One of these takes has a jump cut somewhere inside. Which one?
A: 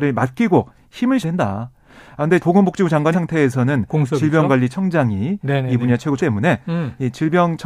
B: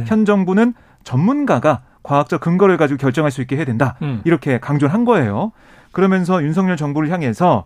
A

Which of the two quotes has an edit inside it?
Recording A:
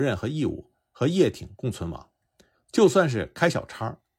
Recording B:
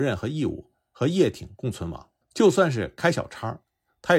B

